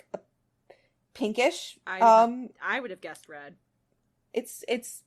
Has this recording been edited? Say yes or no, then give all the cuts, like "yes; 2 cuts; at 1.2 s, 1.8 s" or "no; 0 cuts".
no; 0 cuts